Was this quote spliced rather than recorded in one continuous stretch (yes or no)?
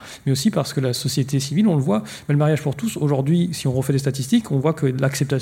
no